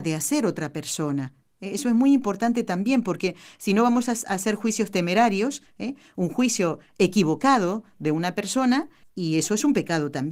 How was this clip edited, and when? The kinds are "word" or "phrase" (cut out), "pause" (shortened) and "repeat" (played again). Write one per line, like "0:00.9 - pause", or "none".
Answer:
0:09.0 - pause